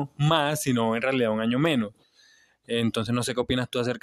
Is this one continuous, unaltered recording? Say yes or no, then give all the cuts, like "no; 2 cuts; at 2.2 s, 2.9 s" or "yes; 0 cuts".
yes; 0 cuts